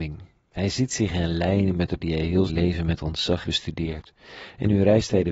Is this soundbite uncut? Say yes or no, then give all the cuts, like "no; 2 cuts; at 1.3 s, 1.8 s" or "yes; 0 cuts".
no; 3 cuts; at 2.0 s, 2.5 s, 3.4 s